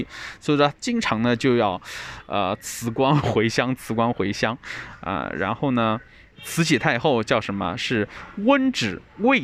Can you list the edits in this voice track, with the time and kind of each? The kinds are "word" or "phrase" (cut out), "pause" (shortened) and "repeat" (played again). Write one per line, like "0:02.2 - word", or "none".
none